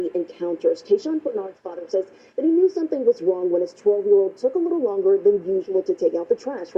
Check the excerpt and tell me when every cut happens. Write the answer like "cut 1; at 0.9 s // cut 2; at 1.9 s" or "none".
none